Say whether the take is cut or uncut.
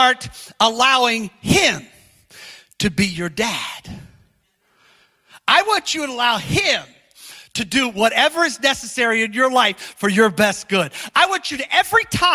uncut